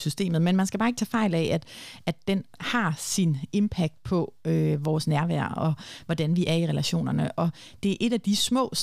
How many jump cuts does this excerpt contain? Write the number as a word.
one